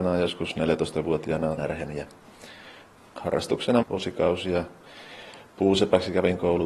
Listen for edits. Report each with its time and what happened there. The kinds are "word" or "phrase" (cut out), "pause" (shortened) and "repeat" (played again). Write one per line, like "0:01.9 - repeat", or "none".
0:01.6 - phrase
0:03.8 - word